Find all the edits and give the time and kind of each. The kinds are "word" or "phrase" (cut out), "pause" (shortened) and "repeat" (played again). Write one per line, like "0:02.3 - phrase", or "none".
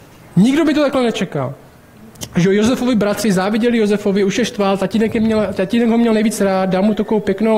none